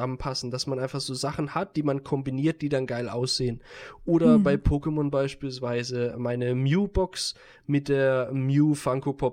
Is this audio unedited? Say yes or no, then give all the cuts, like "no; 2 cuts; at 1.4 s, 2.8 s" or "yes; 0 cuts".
yes; 0 cuts